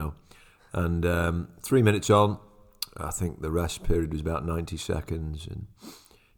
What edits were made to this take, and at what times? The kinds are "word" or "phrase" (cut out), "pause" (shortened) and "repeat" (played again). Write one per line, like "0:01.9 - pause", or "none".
none